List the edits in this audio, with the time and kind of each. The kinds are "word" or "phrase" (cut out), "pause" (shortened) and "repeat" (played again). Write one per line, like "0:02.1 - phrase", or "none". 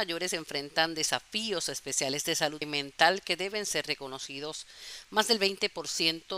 0:02.6 - word